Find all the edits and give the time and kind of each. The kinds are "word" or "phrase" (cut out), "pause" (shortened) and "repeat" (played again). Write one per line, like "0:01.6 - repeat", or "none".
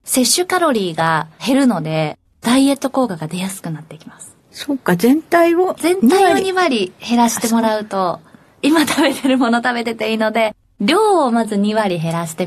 0:04.4 - pause